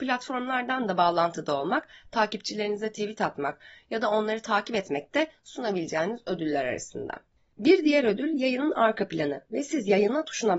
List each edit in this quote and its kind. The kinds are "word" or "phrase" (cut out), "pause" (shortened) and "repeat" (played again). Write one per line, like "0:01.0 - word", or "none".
none

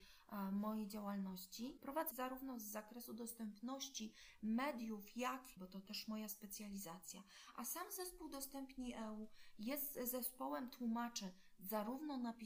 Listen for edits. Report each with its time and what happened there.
0:02.1 - phrase
0:05.6 - phrase

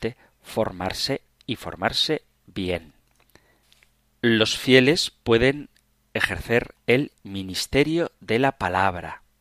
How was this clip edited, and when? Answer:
none

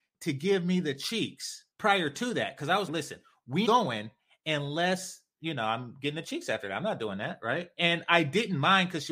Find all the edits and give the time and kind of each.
0:01.7 - pause
0:02.9 - word
0:03.7 - word

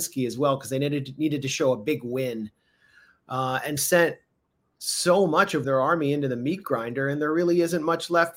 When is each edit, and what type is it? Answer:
0:03.8 - phrase
0:05.6 - phrase

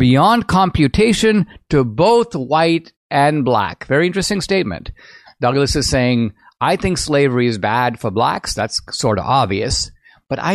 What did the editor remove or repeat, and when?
none

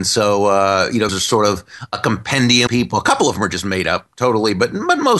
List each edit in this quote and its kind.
0:01.1 - phrase
0:02.7 - word

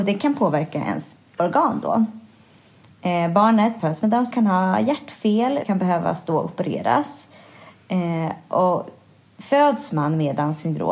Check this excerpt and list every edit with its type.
0:03.8 - word
0:04.3 - word
0:05.6 - word

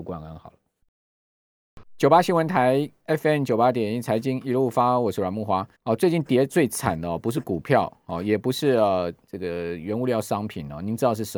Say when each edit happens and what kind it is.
0:05.7 - pause

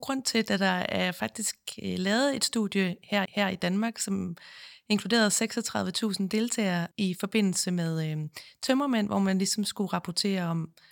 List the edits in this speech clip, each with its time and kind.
0:03.3 - repeat
0:06.9 - pause

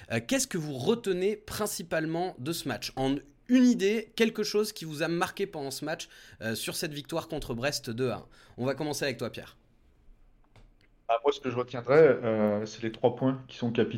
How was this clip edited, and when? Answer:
none

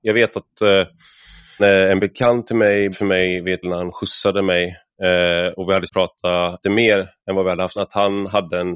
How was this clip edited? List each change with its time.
0:01.6 - word
0:02.9 - word
0:03.6 - word
0:05.9 - word
0:06.6 - word
0:07.8 - word

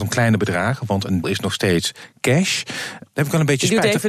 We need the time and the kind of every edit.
0:01.2 - word
0:03.1 - word

